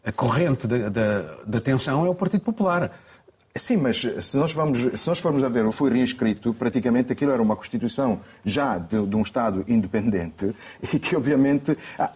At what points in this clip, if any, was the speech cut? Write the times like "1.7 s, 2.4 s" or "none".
5.7 s